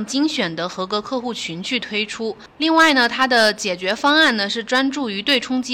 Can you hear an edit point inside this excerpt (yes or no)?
yes